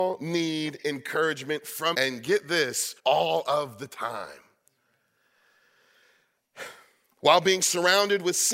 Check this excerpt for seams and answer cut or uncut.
cut